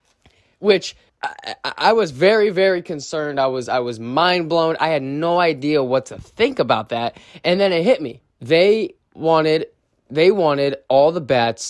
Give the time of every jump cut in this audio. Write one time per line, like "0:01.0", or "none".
0:01.1
0:08.3